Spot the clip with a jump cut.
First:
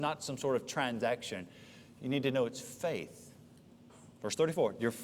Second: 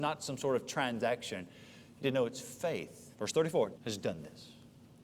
second; 3 cuts; at 2.0 s, 3.1 s, 3.7 s

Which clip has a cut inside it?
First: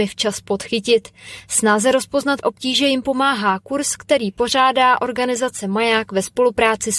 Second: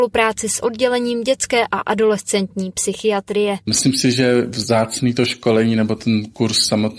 first; 1 cut; at 2.4 s

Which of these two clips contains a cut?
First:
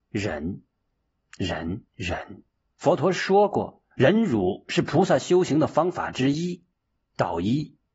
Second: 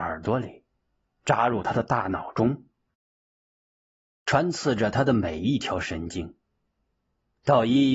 first; 3 cuts; at 1.9 s, 2.6 s, 3.9 s

